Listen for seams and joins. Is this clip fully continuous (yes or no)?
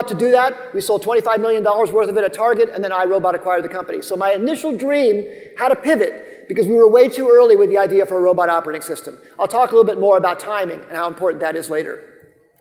yes